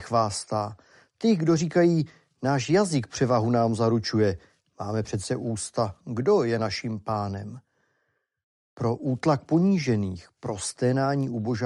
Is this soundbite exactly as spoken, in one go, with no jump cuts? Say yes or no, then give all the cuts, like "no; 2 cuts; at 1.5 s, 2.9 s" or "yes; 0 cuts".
yes; 0 cuts